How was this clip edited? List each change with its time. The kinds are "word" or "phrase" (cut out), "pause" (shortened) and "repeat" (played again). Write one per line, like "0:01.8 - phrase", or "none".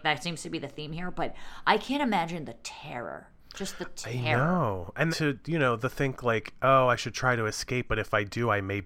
0:05.1 - word